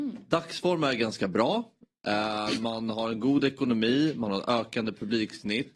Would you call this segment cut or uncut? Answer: uncut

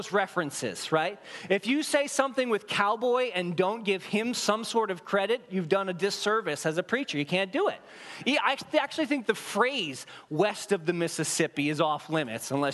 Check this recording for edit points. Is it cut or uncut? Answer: uncut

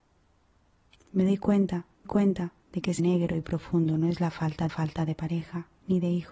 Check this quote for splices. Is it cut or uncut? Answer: cut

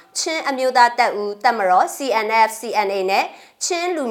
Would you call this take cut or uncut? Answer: uncut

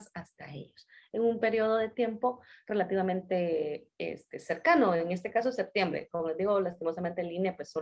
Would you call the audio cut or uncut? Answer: uncut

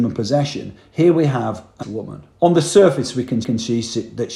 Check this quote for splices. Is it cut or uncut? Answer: cut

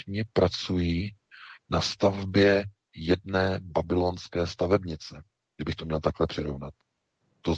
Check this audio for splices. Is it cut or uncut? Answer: uncut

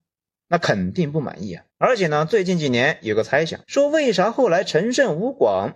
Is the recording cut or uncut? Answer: cut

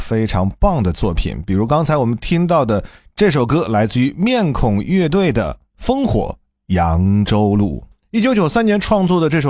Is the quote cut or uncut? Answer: uncut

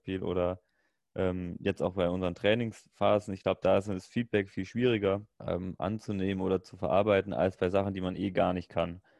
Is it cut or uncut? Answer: cut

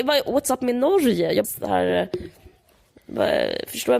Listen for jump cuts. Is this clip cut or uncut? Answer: cut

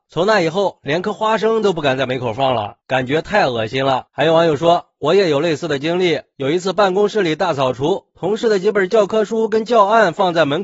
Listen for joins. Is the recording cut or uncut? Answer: cut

